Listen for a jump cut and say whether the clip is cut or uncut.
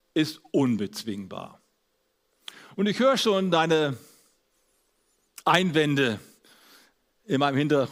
uncut